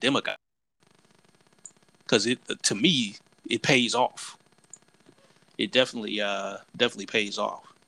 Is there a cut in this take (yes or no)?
no